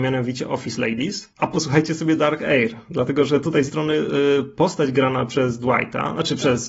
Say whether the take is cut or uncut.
cut